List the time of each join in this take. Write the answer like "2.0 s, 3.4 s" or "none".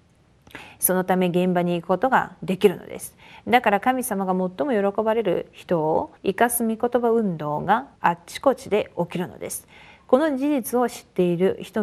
6.2 s, 8.0 s